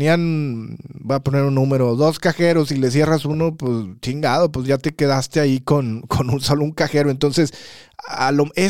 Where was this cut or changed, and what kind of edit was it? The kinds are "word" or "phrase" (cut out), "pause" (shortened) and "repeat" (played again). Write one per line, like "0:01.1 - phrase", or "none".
none